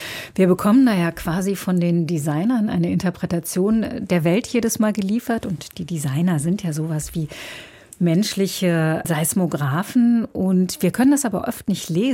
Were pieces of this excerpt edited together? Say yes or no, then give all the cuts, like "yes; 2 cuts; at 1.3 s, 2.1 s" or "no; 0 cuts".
no; 0 cuts